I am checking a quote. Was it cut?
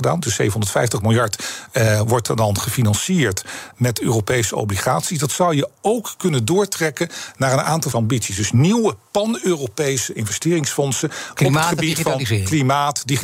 yes; 2 cuts; at 3.7 s, 7.9 s

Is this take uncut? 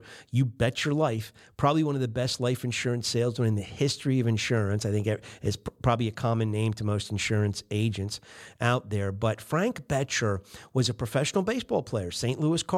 yes; 0 cuts

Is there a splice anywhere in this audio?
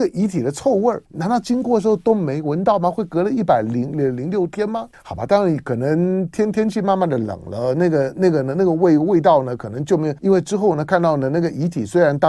yes; 3 cuts; at 1.1 s, 4.9 s, 10.2 s

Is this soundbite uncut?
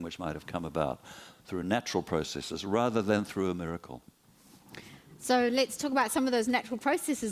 yes; 0 cuts

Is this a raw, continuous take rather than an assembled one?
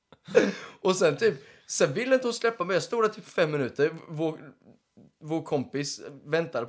yes; 0 cuts

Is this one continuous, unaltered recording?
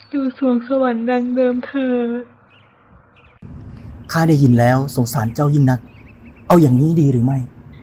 no; 1 cut; at 4.0 s

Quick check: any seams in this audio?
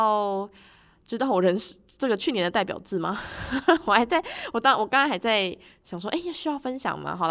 no; 0 cuts

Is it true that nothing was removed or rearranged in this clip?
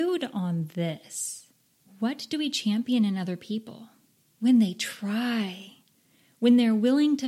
yes; 0 cuts

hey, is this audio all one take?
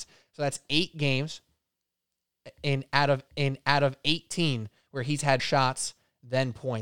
no; 2 cuts; at 3.3 s, 5.4 s

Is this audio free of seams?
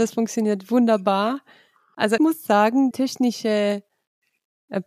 no; 2 cuts; at 2.2 s, 2.9 s

